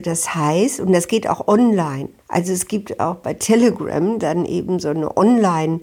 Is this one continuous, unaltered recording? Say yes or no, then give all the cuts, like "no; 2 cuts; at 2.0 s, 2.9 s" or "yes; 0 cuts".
no; 1 cut; at 2.2 s